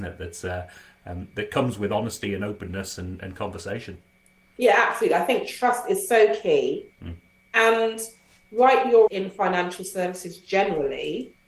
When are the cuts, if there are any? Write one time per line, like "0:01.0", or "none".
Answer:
0:09.1